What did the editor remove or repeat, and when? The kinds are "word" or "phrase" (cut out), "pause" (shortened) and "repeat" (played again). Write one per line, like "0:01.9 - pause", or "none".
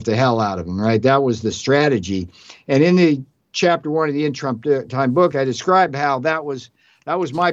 none